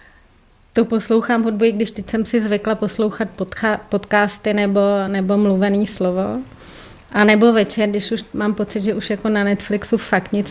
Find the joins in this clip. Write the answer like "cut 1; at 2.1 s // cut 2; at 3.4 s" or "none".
none